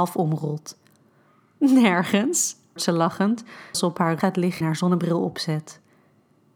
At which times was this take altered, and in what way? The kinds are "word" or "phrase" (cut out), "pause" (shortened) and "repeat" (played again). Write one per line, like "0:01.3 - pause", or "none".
0:02.8 - word
0:03.7 - word
0:04.2 - word
0:04.6 - word

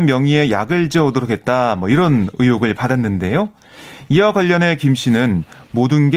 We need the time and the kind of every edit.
none

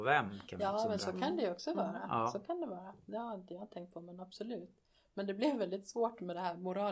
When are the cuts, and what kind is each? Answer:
none

